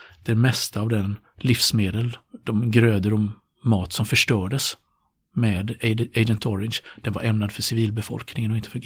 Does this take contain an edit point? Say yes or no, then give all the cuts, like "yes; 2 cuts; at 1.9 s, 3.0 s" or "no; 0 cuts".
no; 0 cuts